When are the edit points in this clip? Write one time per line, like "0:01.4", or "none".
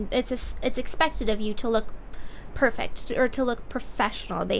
none